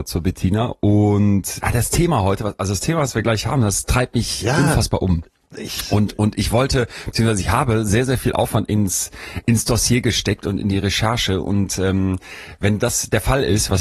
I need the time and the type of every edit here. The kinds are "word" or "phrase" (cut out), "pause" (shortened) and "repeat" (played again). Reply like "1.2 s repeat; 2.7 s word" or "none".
none